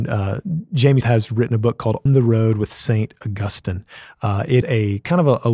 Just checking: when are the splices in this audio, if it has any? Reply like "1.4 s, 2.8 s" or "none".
1.0 s, 2.1 s, 4.6 s